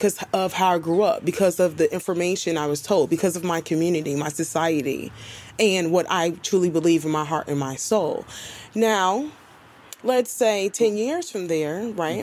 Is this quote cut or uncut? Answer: uncut